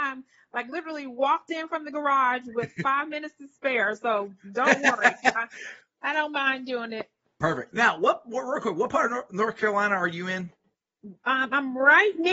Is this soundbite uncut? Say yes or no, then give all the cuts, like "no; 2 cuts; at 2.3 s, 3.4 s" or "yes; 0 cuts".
yes; 0 cuts